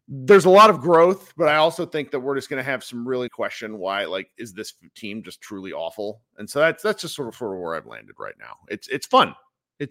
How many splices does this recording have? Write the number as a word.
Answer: one